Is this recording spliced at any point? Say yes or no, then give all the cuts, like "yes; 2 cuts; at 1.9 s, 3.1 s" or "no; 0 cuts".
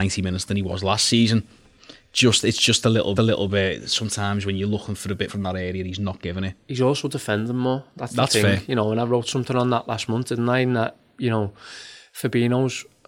yes; 2 cuts; at 3.2 s, 5.3 s